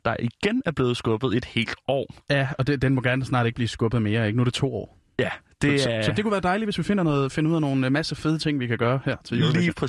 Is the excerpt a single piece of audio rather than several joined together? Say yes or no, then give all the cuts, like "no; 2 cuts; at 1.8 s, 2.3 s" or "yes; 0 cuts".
yes; 0 cuts